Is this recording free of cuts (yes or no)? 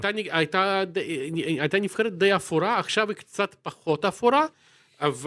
yes